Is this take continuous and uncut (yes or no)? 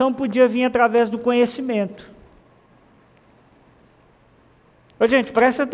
yes